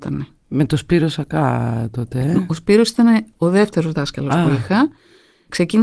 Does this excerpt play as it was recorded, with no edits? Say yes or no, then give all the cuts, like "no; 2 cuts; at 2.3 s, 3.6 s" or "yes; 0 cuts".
yes; 0 cuts